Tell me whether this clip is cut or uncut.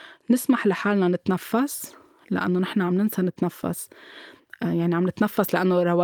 uncut